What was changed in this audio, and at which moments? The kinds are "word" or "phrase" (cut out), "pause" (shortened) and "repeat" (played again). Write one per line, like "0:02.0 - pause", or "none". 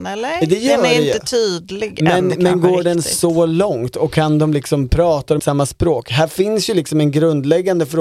0:05.4 - word